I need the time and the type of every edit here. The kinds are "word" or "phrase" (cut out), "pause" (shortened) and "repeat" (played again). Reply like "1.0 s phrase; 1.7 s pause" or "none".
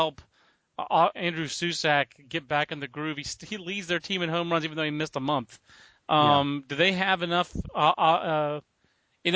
1.1 s word